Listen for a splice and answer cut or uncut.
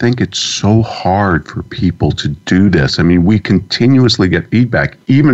uncut